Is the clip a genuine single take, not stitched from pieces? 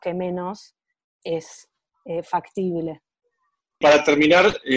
yes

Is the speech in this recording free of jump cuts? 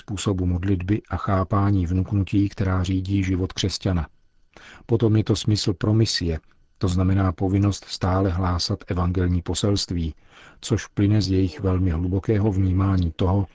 yes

